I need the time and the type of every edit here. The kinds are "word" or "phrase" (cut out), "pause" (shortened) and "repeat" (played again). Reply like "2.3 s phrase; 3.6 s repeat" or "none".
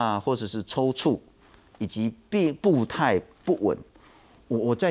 none